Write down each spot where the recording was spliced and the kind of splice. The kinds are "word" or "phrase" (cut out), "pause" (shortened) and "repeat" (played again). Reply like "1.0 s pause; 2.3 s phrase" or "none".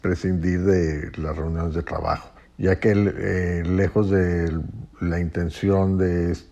2.4 s pause